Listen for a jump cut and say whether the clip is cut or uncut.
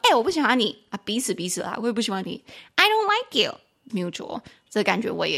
cut